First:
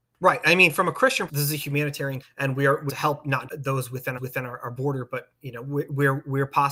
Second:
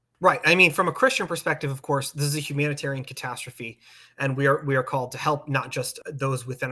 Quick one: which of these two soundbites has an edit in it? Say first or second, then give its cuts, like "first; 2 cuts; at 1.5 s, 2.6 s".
first; 5 cuts; at 1.3 s, 2.2 s, 2.9 s, 3.5 s, 4.2 s